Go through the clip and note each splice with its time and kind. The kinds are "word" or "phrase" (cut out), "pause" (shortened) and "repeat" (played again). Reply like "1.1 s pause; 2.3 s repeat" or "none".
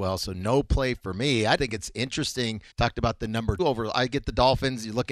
1.6 s word; 2.7 s pause; 3.6 s word